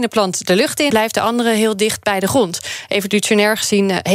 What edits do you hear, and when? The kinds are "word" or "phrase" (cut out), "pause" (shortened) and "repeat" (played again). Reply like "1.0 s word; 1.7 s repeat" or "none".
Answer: 0.9 s word